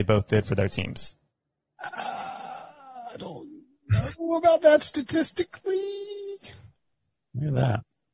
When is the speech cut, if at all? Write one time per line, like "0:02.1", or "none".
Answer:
none